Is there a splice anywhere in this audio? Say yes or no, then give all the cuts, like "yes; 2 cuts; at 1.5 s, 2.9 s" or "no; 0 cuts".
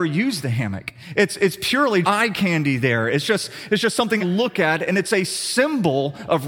yes; 2 cuts; at 2.0 s, 4.2 s